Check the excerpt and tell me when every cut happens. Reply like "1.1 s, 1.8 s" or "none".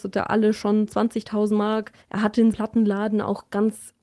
2.0 s, 2.5 s